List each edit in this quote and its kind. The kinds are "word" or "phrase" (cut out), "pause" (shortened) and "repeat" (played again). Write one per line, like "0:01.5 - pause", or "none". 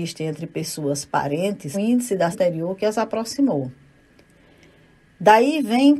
0:01.7 - word
0:02.3 - word